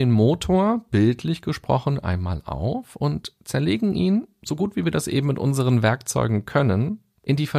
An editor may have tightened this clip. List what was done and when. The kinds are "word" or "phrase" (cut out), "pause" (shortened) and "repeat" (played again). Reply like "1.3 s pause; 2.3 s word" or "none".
none